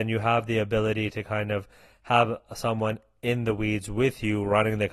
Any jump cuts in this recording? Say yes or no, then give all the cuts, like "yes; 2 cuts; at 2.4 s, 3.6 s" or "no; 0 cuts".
no; 0 cuts